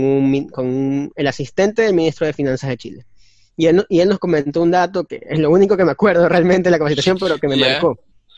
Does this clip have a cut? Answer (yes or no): no